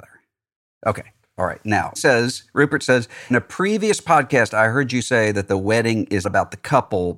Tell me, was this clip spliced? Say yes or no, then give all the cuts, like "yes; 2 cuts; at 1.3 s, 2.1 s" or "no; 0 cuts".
yes; 3 cuts; at 2.0 s, 3.3 s, 6.2 s